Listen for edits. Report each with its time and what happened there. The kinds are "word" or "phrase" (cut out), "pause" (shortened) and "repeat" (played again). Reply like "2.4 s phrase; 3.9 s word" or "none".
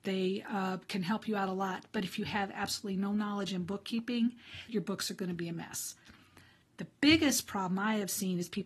4.7 s word